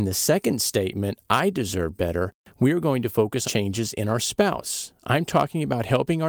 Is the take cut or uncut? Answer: cut